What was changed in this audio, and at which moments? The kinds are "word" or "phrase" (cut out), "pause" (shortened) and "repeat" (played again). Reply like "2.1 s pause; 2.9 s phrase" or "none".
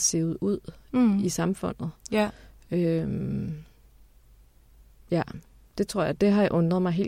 none